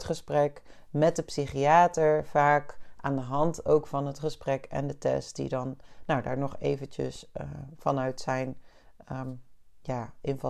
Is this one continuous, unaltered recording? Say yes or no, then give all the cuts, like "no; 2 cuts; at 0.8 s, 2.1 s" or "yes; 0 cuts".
yes; 0 cuts